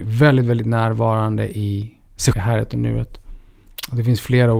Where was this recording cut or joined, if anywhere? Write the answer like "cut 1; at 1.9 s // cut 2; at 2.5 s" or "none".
cut 1; at 2.3 s